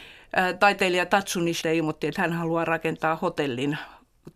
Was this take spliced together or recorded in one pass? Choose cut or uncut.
cut